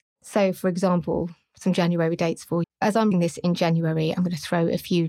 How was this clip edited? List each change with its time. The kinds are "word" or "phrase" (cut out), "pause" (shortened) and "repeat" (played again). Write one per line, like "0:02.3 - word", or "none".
0:02.6 - word
0:03.1 - word